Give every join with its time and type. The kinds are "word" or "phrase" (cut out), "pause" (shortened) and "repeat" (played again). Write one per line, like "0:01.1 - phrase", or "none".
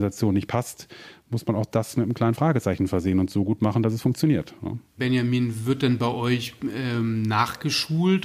0:04.9 - pause